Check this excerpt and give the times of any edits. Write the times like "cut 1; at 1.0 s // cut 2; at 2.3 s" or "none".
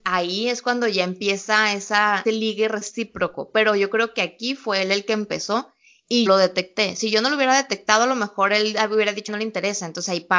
cut 1; at 2.2 s // cut 2; at 6.3 s // cut 3; at 9.3 s